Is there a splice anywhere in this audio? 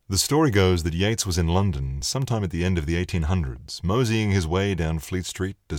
no; 0 cuts

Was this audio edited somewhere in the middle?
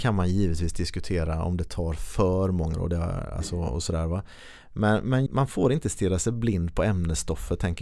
yes; 2 cuts; at 2.7 s, 5.3 s

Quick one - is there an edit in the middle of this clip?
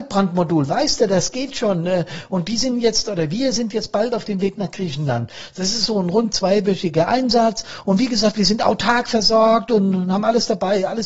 no; 0 cuts

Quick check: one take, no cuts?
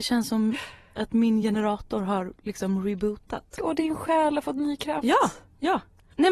yes; 0 cuts

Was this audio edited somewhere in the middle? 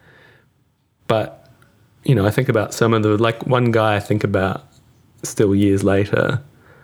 no; 0 cuts

